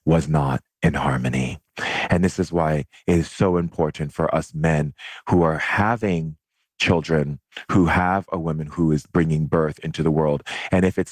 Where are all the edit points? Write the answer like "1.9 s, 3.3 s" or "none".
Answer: none

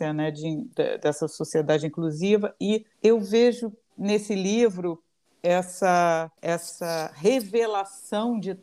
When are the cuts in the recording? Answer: 2.9 s, 6.4 s

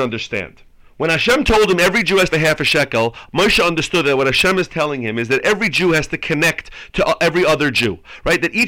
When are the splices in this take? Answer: 2.3 s

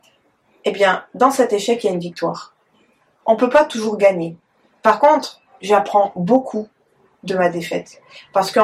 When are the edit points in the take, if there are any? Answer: none

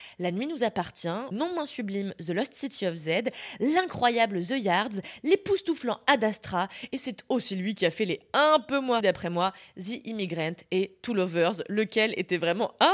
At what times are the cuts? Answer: 1.3 s, 9.0 s

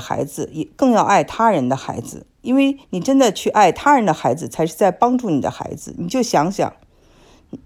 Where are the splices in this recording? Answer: 2.8 s

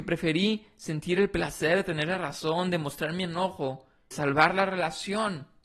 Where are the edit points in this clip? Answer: 4.1 s

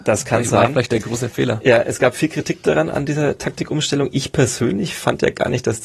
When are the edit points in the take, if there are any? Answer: none

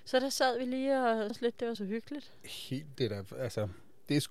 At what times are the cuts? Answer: 1.3 s, 1.7 s, 2.9 s

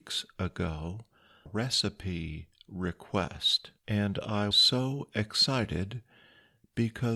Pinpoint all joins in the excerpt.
1.5 s, 3.8 s, 4.5 s

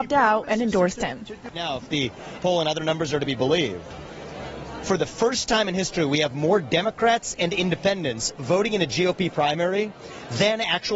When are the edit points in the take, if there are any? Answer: 2.4 s

